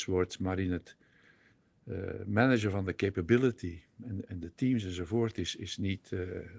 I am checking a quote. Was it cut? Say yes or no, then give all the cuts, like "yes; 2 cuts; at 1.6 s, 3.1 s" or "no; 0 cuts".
no; 0 cuts